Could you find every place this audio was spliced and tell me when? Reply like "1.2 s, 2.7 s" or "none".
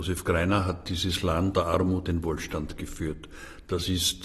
1.5 s, 2.1 s

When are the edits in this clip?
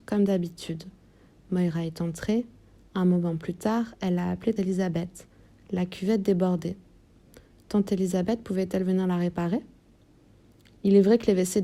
4.6 s

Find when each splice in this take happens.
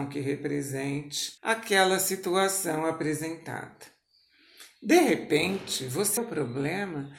1.4 s, 6.2 s

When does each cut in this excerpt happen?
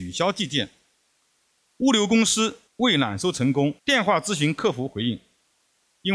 2.7 s, 3.8 s

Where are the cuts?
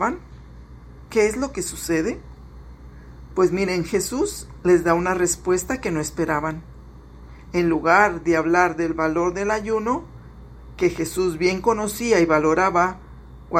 none

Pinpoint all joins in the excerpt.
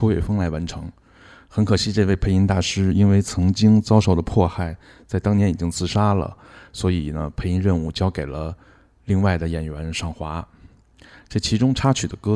none

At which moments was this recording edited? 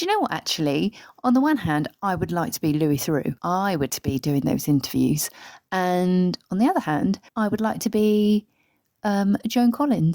3.4 s, 3.9 s, 7.3 s

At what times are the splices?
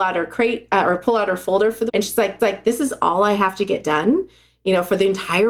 1.9 s, 2.4 s

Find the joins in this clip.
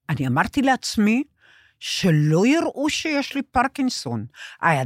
none

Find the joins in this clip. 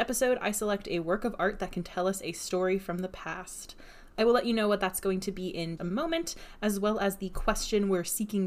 5.8 s

